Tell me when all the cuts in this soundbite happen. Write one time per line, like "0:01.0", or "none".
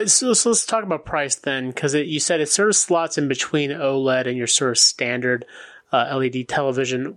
none